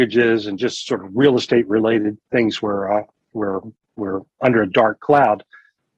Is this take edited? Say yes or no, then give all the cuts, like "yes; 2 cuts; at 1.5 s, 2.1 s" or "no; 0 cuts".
yes; 2 cuts; at 2.2 s, 3.8 s